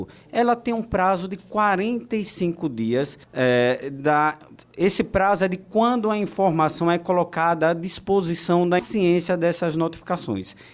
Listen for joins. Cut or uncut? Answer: cut